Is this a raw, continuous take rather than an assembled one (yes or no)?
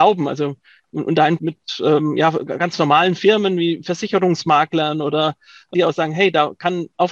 no